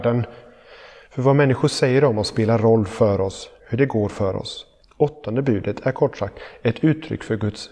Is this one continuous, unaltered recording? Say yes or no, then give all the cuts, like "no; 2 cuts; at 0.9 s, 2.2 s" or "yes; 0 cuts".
no; 2 cuts; at 3.6 s, 4.8 s